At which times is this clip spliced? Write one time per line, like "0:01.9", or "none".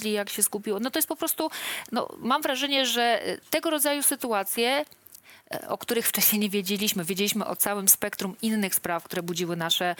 none